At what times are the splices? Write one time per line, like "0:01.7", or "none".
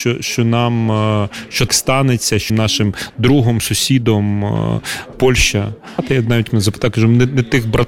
0:01.7
0:02.5
0:05.1
0:06.5